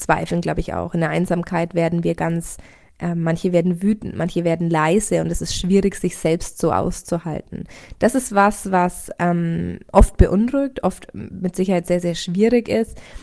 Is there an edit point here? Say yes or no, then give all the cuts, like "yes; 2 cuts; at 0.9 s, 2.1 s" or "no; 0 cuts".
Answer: no; 0 cuts